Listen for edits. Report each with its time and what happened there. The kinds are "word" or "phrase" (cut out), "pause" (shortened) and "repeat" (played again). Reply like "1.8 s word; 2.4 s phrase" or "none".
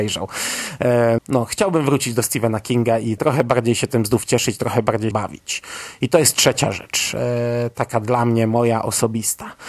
1.2 s word; 3.2 s word; 5.1 s phrase